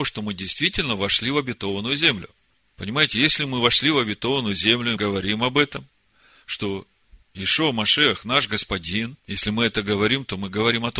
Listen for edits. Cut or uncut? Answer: cut